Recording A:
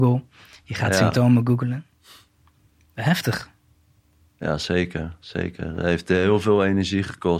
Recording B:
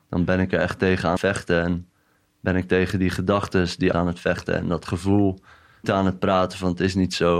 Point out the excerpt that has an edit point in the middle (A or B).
B